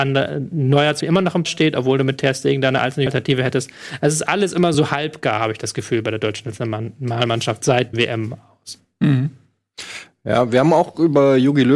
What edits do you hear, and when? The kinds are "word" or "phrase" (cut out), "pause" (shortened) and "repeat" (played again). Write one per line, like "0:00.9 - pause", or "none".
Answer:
0:01.0 - word
0:01.5 - word
0:03.1 - word
0:04.7 - word
0:07.9 - word

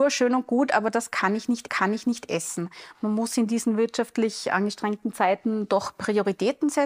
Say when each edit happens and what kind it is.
0:01.7 - repeat

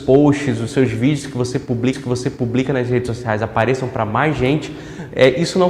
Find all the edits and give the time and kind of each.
0:01.9 - repeat

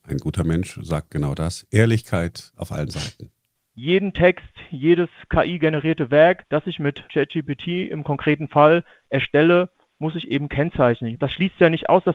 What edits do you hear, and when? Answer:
0:07.1 - pause

